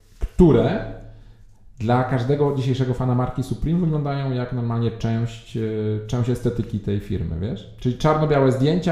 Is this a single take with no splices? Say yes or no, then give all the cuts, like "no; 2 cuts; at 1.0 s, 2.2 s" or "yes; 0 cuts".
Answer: yes; 0 cuts